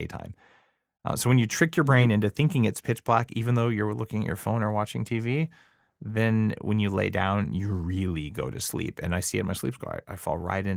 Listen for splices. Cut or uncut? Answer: uncut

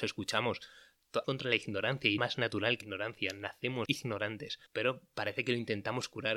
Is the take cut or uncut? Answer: cut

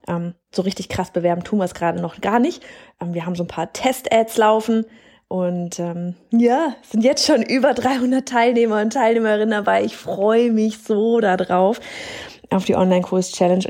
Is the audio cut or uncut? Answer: uncut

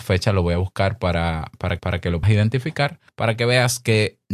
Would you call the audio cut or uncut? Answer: cut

